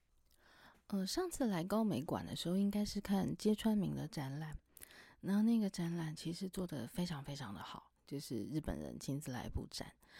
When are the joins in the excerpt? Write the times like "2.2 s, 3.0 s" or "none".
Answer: 8.0 s